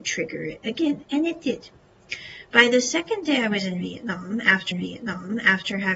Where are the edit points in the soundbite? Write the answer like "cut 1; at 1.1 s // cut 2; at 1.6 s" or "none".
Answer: cut 1; at 4.7 s